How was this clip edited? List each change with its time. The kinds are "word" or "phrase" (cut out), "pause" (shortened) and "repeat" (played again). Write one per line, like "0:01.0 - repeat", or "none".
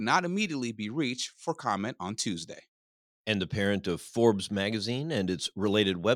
none